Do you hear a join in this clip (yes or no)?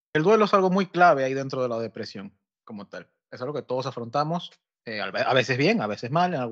no